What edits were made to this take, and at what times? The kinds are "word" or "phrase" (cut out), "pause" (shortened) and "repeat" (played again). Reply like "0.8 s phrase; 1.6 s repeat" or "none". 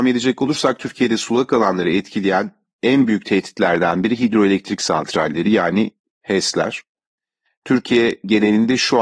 none